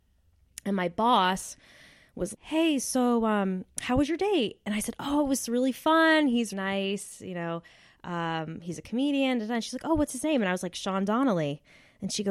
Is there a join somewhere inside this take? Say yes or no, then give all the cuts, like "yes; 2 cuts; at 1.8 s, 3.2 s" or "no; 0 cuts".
yes; 2 cuts; at 2.3 s, 6.5 s